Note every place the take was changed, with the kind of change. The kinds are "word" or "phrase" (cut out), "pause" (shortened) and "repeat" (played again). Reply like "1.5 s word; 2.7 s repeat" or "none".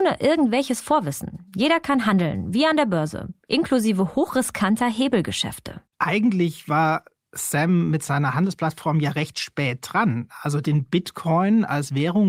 5.9 s pause